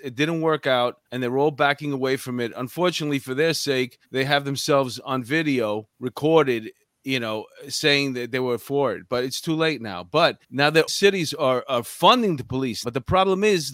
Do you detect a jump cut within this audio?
yes; 7 cuts; at 1.1 s, 4.0 s, 5.9 s, 10.4 s, 10.9 s, 11.6 s, 12.8 s

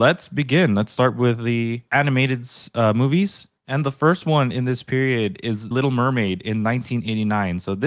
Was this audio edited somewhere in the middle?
yes; 3 cuts; at 1.9 s, 3.6 s, 5.7 s

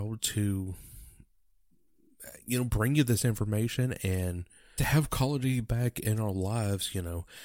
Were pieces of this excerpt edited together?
yes; 1 cut; at 4.8 s

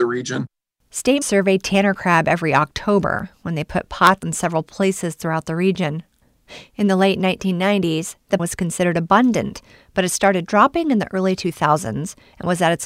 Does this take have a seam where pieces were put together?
yes; 3 cuts; at 1.2 s, 4.2 s, 8.4 s

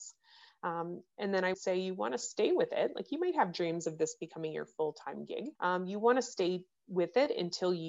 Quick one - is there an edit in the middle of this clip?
yes; 2 cuts; at 1.5 s, 5.6 s

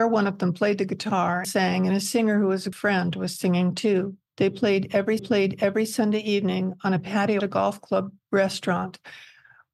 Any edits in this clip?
yes; 5 cuts; at 1.4 s, 2.7 s, 4.3 s, 5.2 s, 7.4 s

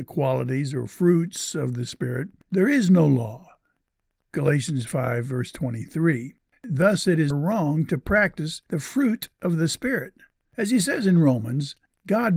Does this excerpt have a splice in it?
yes; 1 cut; at 7.3 s

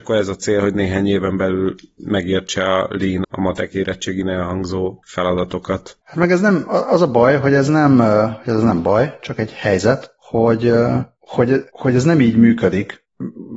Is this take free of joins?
no; 2 cuts; at 3.2 s, 11.7 s

